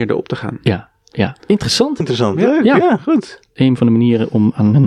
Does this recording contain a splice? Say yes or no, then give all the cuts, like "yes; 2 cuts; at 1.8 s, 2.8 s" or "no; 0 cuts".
yes; 2 cuts; at 1.4 s, 2.0 s